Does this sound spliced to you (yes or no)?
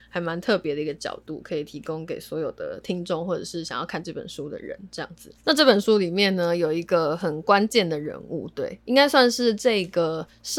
yes